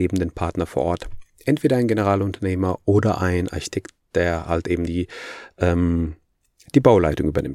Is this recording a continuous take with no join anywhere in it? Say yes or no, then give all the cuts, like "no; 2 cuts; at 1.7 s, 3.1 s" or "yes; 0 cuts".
no; 1 cut; at 4.9 s